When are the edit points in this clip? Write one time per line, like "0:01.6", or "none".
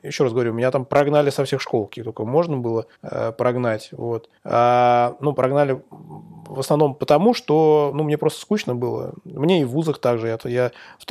0:02.9
0:04.4